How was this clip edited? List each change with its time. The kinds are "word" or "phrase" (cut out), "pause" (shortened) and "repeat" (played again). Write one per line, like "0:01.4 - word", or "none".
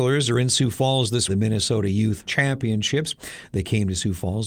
0:01.3 - phrase
0:02.2 - word